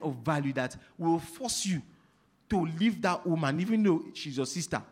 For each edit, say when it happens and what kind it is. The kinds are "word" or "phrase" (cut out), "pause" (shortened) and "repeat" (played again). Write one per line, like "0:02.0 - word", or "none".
none